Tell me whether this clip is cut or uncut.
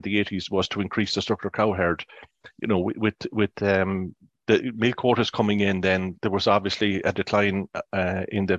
uncut